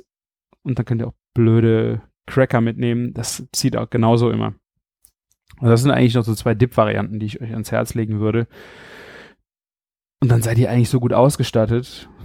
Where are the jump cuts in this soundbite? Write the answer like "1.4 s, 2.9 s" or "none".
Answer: none